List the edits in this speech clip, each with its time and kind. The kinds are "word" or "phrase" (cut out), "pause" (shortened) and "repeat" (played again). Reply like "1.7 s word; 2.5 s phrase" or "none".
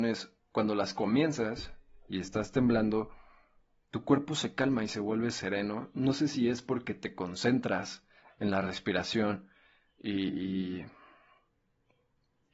none